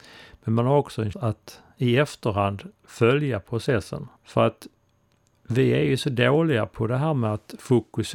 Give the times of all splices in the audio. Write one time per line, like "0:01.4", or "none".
0:01.1
0:04.2